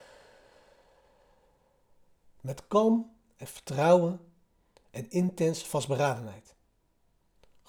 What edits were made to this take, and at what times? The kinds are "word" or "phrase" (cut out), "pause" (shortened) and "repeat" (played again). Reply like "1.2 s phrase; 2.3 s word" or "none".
none